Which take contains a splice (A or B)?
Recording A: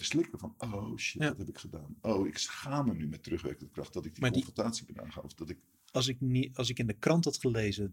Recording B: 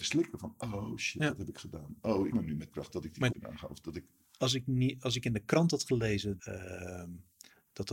B